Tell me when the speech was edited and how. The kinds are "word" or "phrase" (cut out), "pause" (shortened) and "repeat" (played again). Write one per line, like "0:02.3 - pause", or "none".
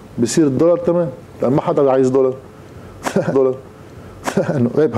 0:03.3 - repeat